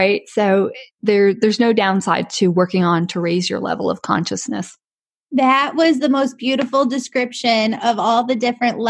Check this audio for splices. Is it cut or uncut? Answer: uncut